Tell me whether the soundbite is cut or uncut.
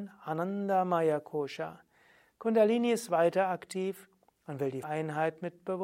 cut